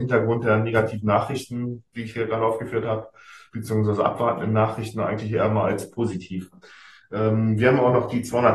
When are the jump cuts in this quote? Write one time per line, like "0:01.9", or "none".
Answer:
none